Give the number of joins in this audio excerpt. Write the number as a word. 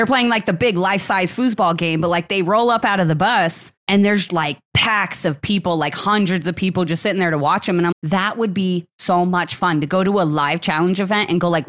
three